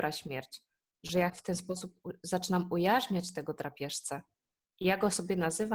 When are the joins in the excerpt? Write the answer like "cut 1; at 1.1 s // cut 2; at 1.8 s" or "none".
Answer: cut 1; at 1.3 s